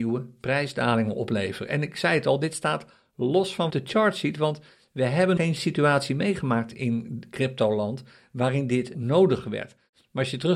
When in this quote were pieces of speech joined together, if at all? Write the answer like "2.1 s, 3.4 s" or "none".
3.7 s, 5.4 s, 8.9 s